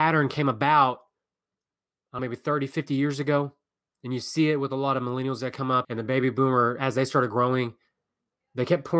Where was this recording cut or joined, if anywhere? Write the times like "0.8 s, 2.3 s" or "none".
2.2 s, 5.8 s